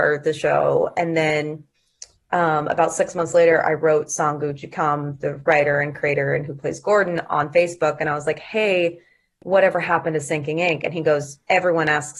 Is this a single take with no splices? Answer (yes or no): yes